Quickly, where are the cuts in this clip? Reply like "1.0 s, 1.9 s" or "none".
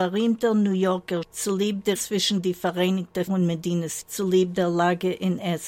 1.2 s, 2.0 s, 3.3 s, 4.0 s

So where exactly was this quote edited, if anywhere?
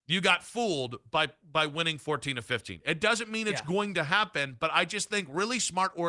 none

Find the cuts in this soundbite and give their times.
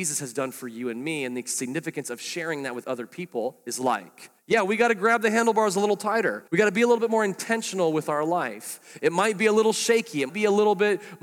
4.4 s, 6.5 s, 10.3 s

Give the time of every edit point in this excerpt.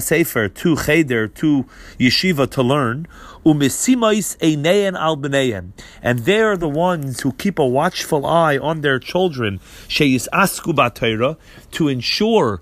none

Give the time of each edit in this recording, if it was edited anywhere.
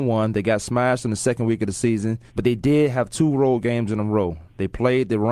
2.3 s

